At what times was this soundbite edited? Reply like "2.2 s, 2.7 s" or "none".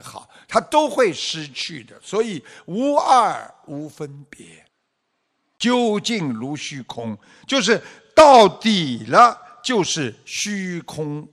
none

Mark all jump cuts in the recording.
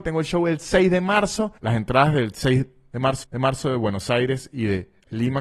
1.6 s, 3.2 s

